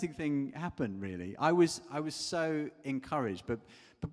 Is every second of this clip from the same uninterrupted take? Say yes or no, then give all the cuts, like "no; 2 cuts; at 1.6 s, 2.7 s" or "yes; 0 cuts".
yes; 0 cuts